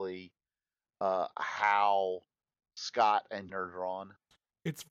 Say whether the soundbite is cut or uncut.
cut